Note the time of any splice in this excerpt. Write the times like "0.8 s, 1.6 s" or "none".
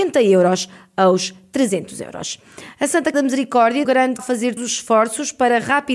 3.1 s, 3.8 s, 4.2 s, 4.6 s